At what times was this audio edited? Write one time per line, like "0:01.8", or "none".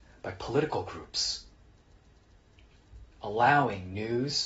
0:03.1